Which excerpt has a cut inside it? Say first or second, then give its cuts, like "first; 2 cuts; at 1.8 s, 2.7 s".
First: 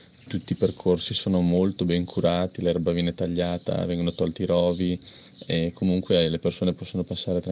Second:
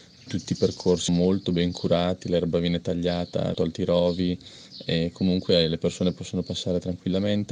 second; 2 cuts; at 1.1 s, 3.5 s